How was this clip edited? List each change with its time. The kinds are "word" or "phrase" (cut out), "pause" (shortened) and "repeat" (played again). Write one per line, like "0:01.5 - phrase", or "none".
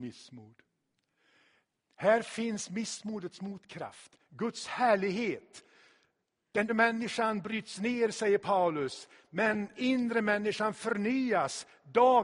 0:06.7 - word
0:09.7 - word